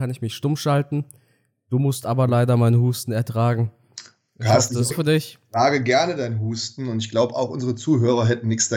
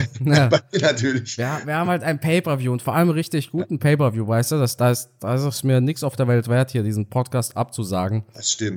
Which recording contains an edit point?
first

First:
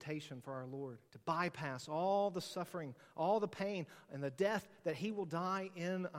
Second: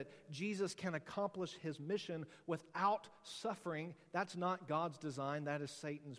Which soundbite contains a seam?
first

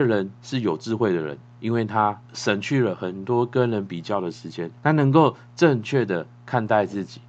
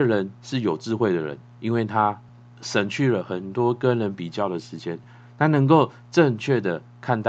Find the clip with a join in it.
first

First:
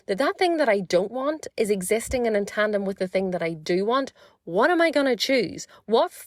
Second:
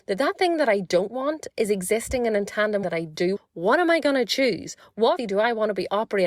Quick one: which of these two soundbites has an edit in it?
second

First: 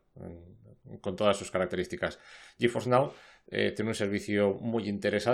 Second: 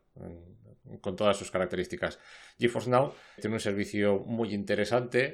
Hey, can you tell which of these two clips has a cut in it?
second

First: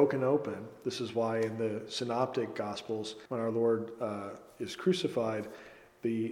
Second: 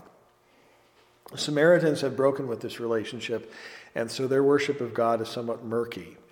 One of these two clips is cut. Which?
first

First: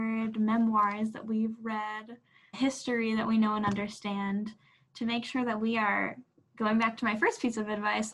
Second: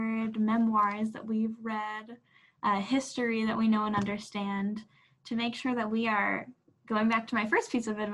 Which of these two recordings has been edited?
first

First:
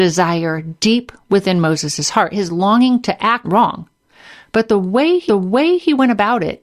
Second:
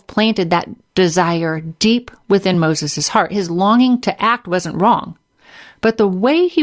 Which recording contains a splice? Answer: first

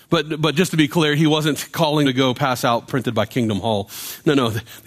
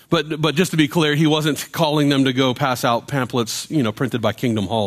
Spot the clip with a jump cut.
first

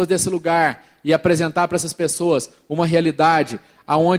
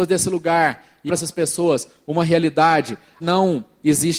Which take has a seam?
second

